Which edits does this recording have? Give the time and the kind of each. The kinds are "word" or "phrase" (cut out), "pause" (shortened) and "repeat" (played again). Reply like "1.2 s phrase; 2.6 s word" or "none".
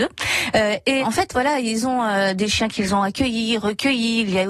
1.0 s word